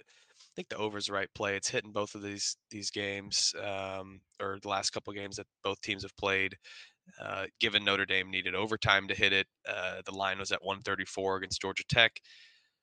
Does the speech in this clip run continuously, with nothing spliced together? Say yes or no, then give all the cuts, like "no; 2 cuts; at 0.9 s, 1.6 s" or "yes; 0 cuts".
yes; 0 cuts